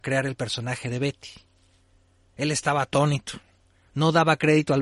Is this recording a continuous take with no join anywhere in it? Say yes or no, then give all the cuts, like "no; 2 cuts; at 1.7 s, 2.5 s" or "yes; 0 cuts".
yes; 0 cuts